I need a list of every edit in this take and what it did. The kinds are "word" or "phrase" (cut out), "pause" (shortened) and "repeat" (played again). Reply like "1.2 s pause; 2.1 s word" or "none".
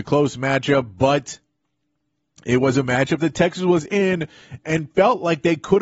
4.6 s word